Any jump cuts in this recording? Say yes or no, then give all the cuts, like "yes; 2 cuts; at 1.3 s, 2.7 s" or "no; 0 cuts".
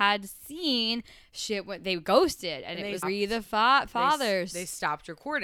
yes; 1 cut; at 3.0 s